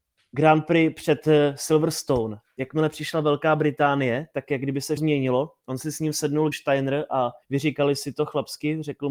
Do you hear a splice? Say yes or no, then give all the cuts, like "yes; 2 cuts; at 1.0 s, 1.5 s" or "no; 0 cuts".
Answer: yes; 3 cuts; at 5.0 s, 6.5 s, 7.4 s